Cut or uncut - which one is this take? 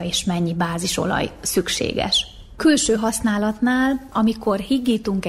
uncut